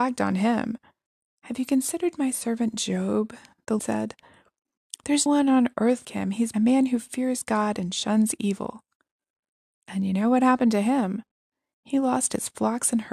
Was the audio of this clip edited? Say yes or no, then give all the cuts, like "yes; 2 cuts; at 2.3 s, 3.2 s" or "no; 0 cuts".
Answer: yes; 4 cuts; at 3.8 s, 5.3 s, 6.0 s, 6.5 s